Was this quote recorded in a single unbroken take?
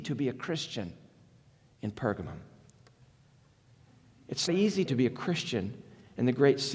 no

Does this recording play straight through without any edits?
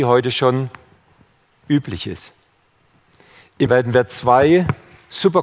no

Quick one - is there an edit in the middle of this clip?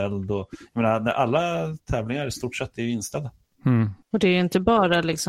yes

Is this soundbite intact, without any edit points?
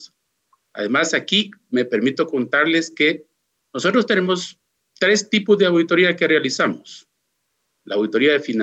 yes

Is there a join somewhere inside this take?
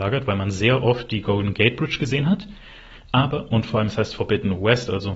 no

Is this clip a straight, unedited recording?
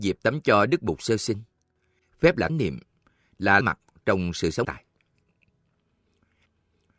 no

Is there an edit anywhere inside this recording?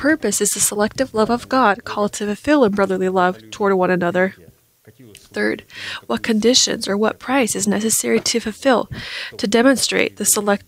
no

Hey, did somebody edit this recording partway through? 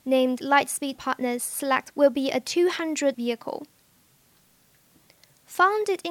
yes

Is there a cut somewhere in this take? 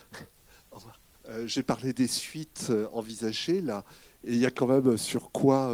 yes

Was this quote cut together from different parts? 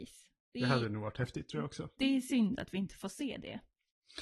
no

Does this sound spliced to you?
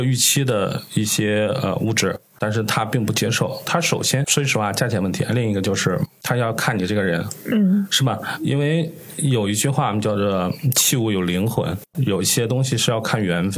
no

